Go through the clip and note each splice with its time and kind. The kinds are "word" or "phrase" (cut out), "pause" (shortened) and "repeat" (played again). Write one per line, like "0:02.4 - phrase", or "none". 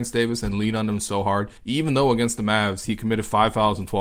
0:01.6 - pause